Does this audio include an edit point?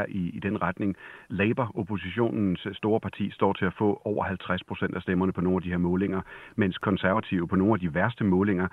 no; 0 cuts

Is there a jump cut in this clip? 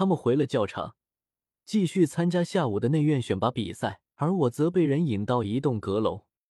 yes; 1 cut; at 4.1 s

